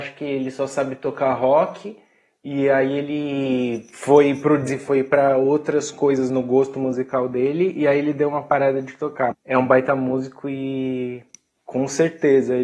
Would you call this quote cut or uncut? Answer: cut